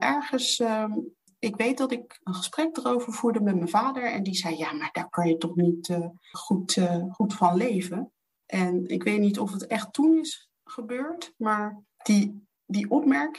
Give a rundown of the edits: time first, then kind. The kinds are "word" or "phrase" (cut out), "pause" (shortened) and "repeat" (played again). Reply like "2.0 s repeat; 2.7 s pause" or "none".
none